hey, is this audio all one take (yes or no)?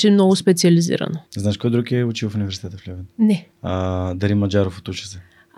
no